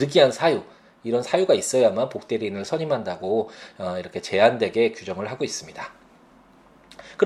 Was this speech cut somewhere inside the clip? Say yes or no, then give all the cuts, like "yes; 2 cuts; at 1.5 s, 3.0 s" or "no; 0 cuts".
no; 0 cuts